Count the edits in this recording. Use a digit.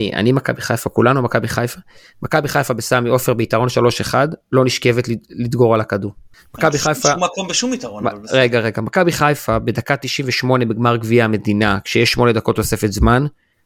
0